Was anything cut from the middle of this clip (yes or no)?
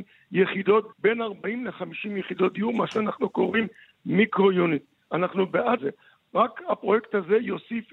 yes